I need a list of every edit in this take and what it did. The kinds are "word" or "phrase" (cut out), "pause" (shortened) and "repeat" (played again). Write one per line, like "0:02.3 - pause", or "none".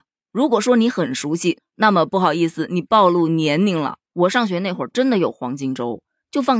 0:04.0 - pause